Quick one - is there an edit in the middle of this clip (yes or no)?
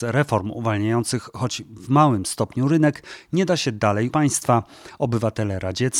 yes